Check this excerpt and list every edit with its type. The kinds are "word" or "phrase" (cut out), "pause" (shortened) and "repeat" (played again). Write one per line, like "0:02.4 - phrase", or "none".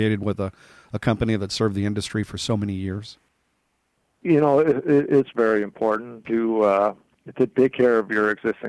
none